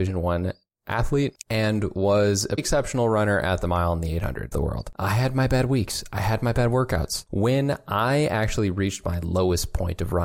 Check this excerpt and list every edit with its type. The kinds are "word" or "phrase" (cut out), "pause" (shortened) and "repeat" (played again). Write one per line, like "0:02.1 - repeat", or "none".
0:01.4 - pause
0:02.6 - word
0:04.5 - phrase